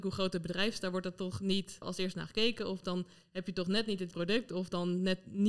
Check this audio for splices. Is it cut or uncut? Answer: cut